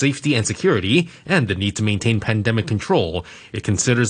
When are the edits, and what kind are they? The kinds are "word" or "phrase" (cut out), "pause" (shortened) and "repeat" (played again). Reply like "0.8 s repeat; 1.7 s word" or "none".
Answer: none